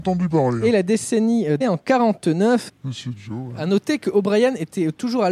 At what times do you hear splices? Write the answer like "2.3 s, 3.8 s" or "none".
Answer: 1.6 s, 2.7 s